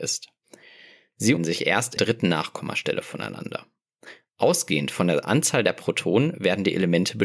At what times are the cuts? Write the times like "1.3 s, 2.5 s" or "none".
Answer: 1.4 s, 2.0 s